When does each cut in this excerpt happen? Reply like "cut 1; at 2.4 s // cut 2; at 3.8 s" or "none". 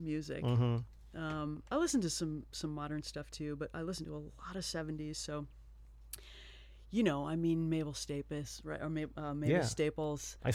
none